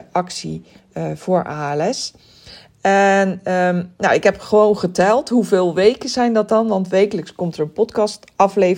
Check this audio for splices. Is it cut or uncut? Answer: uncut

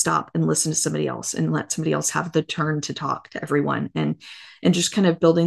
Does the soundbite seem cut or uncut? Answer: uncut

